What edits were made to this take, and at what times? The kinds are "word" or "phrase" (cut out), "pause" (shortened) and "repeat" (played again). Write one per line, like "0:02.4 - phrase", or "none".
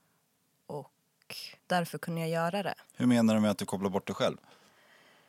0:01.6 - pause
0:02.9 - pause

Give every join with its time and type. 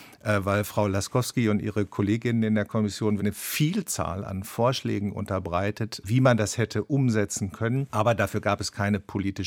0:03.2 - word
0:06.0 - word
0:07.9 - pause

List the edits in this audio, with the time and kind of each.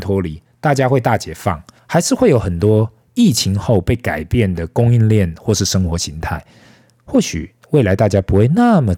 0:01.8 - pause

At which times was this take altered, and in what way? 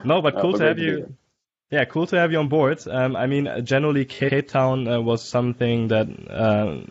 none

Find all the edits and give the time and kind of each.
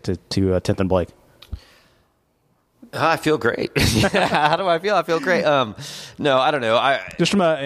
none

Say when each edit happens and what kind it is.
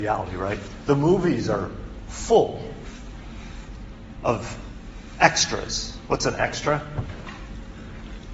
none

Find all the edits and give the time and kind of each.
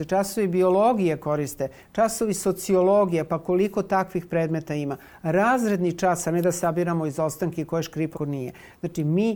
0:08.1 - word

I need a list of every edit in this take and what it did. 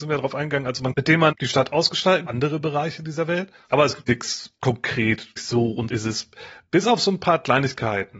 0:00.9 - phrase
0:01.3 - word
0:02.3 - phrase
0:04.0 - word
0:05.4 - word
0:05.9 - word

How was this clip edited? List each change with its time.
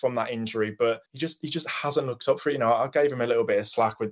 0:01.1 - pause

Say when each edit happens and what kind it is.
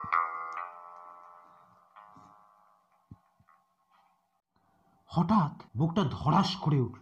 0:05.7 - pause

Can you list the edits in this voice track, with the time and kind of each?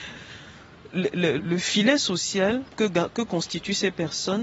0:01.4 - word
0:02.7 - word

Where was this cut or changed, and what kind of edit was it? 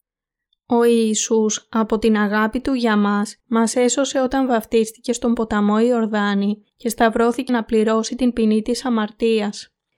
0:03.4 - pause
0:06.7 - pause
0:07.5 - word

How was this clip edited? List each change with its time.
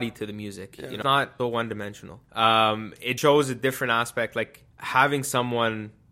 0:01.0 - word
0:01.4 - word
0:02.2 - pause
0:03.2 - word
0:04.7 - pause

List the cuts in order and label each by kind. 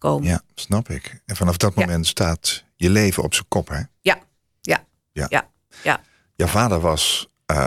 none

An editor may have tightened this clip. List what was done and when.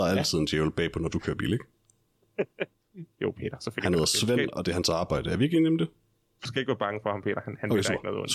none

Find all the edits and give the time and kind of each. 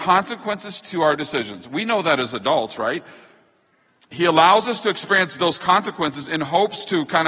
none

